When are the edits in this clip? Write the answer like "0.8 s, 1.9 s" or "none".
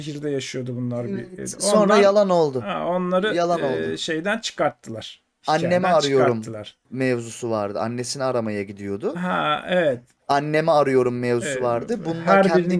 none